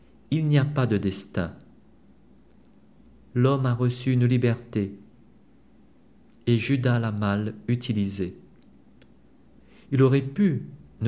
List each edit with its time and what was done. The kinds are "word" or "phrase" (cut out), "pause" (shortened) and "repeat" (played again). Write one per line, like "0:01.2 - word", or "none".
none